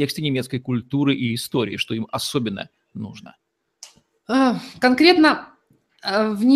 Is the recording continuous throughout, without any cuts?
yes; 0 cuts

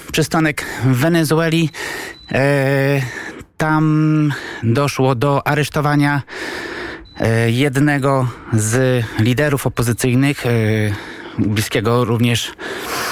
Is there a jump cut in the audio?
no; 0 cuts

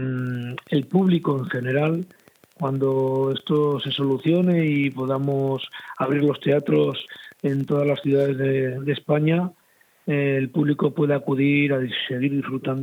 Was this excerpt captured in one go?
yes; 0 cuts

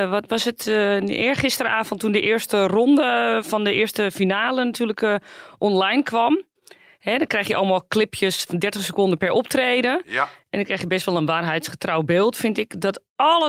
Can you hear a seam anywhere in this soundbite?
no; 0 cuts

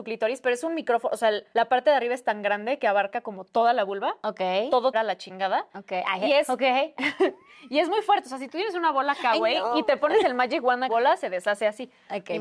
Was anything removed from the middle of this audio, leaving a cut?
yes; 3 cuts; at 1.5 s, 4.9 s, 10.9 s

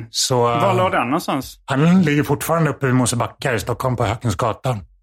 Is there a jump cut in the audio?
no; 0 cuts

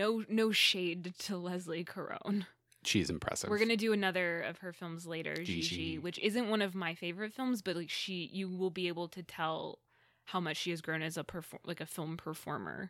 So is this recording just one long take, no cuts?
yes; 0 cuts

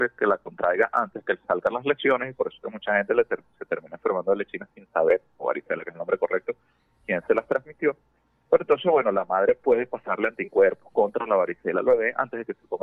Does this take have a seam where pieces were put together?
no; 0 cuts

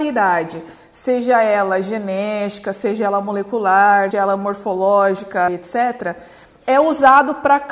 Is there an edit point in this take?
yes; 2 cuts; at 4.1 s, 5.5 s

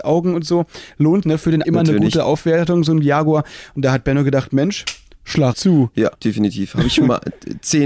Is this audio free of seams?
no; 4 cuts; at 1.2 s, 1.6 s, 5.5 s, 6.2 s

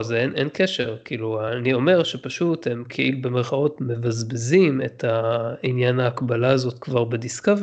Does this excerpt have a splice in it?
no; 0 cuts

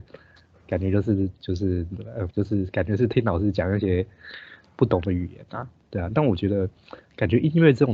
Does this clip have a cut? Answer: yes; 1 cut; at 2.3 s

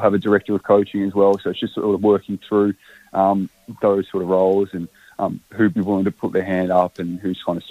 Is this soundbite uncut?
yes; 0 cuts

